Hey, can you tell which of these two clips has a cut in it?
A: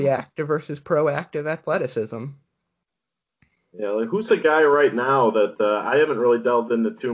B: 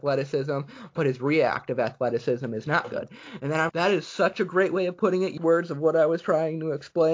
B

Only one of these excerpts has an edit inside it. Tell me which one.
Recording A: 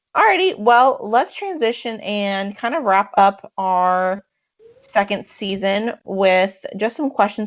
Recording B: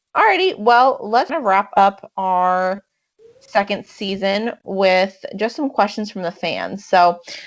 B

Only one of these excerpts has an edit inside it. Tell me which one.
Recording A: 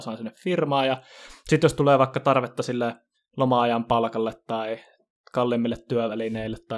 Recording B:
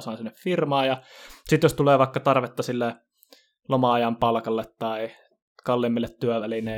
A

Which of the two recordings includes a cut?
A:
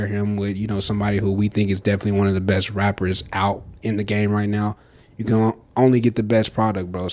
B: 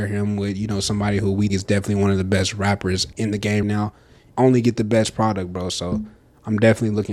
B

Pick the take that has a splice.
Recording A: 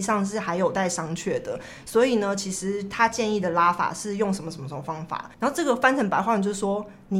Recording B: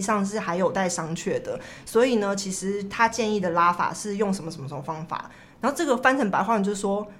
A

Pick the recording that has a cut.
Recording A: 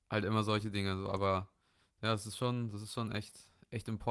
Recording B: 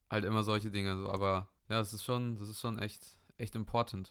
B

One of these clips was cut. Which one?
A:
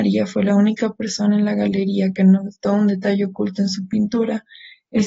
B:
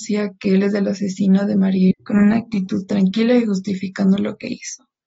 B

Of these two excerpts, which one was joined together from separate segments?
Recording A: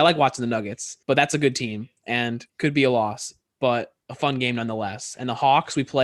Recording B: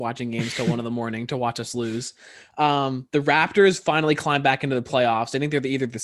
A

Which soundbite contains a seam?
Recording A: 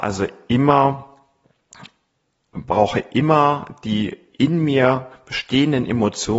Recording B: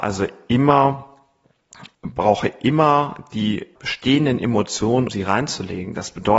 B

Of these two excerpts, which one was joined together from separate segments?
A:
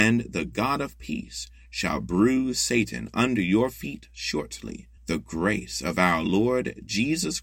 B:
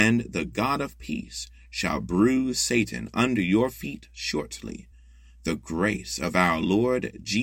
A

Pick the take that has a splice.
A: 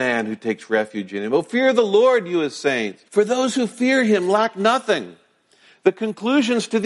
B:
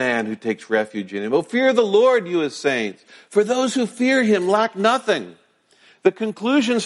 A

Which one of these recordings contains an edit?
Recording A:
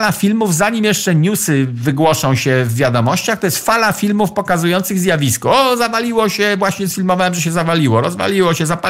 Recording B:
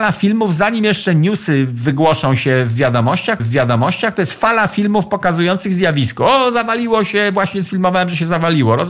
B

